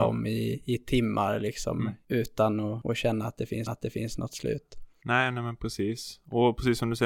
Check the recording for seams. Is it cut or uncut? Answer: cut